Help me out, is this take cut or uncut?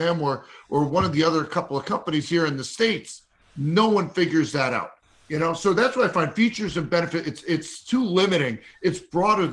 uncut